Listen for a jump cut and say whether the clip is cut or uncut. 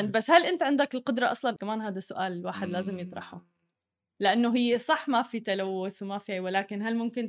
cut